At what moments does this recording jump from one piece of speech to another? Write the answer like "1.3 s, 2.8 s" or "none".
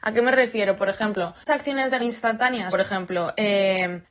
1.5 s, 2.0 s, 2.7 s

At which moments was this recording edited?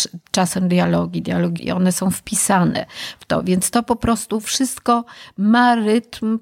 1.6 s

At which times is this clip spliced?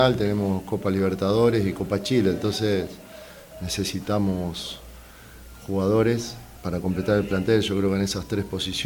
none

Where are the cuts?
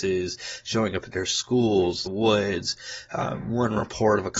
2.1 s

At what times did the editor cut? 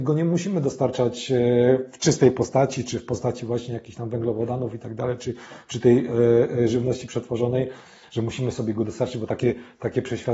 none

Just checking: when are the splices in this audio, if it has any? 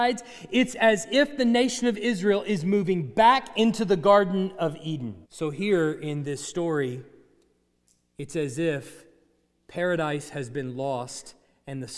5.2 s

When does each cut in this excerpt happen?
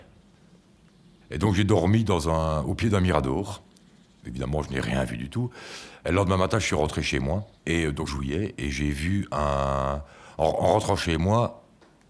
7.6 s, 8.1 s

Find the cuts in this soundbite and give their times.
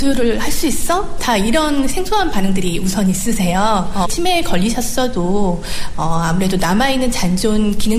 4.0 s

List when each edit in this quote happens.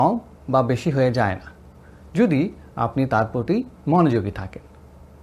none

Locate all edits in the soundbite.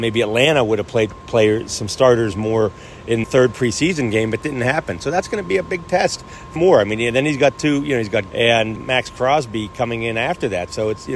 1.1 s, 3.2 s, 4.4 s, 6.6 s, 8.3 s, 8.8 s

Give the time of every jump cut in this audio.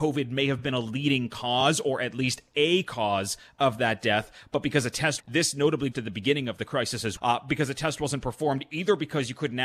5.2 s, 5.9 s, 7.2 s

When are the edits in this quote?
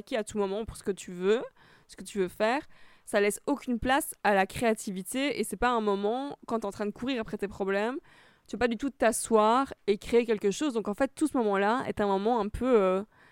none

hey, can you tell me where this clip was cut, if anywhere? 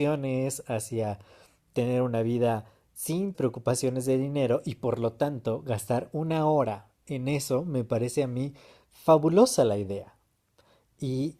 3.3 s

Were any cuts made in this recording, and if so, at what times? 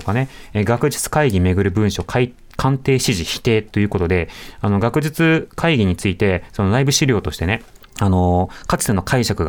7.8 s

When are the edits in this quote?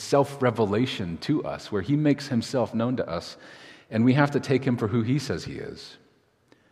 none

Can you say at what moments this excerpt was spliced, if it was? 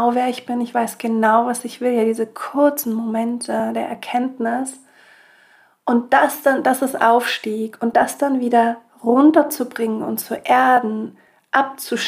none

